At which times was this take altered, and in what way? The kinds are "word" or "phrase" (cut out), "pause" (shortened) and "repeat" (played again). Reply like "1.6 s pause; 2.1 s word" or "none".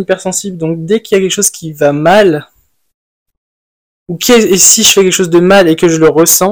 none